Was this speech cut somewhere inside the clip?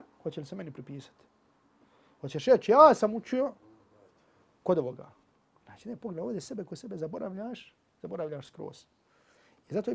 no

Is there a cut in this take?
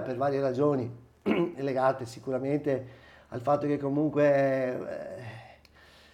no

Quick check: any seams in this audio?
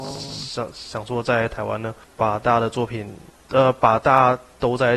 no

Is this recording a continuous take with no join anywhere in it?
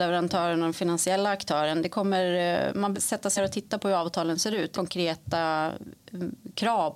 no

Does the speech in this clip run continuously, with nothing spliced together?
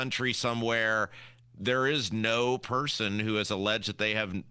yes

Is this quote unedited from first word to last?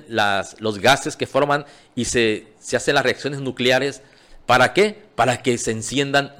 yes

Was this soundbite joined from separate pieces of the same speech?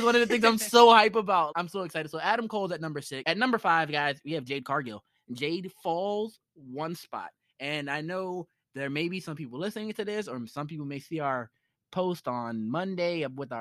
no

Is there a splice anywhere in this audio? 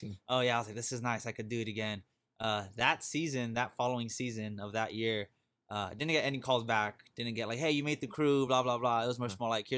no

